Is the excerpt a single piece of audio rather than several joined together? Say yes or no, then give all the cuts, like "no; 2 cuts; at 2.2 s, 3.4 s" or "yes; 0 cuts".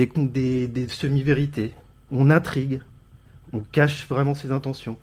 yes; 0 cuts